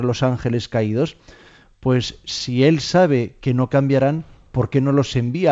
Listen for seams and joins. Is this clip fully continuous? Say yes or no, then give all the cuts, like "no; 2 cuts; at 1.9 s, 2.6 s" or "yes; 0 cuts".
yes; 0 cuts